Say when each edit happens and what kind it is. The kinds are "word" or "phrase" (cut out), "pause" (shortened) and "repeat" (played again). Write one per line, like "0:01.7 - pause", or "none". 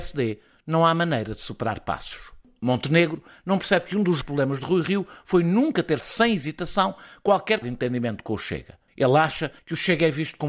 0:04.2 - word
0:06.0 - word
0:07.6 - word